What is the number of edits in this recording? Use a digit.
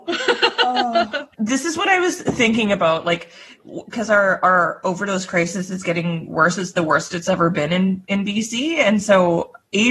0